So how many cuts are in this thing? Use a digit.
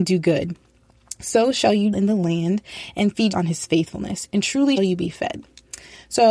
3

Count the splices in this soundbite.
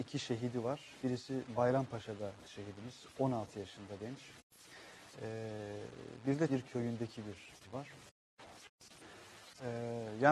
4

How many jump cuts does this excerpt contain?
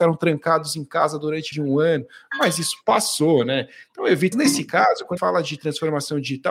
3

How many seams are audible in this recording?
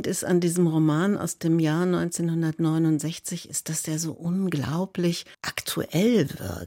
1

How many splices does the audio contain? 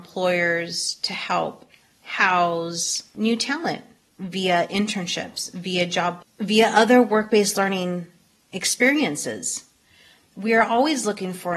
1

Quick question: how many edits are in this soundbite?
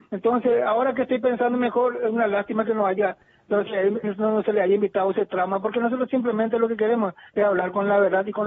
1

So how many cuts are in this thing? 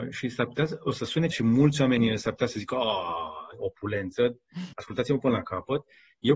2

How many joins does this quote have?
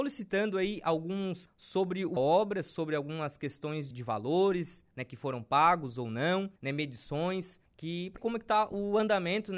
6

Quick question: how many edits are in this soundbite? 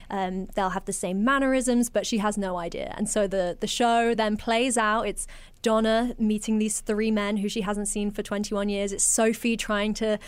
0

